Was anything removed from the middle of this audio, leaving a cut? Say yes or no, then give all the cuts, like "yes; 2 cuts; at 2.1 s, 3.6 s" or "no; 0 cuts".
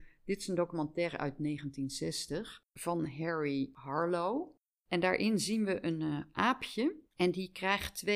yes; 2 cuts; at 2.7 s, 7.1 s